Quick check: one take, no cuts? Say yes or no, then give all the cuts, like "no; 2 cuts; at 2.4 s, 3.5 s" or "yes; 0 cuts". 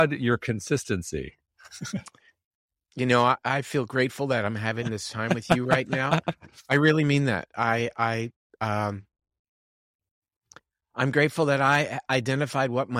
yes; 0 cuts